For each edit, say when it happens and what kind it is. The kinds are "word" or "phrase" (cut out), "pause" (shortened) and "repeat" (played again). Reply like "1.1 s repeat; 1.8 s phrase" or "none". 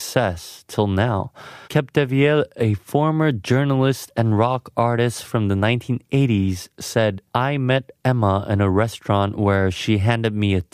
1.6 s pause; 7.3 s pause